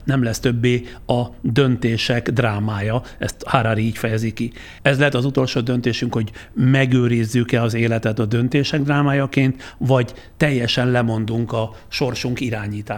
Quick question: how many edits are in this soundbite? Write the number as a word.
one